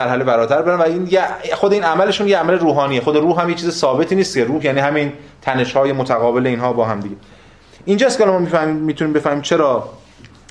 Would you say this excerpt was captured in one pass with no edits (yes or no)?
yes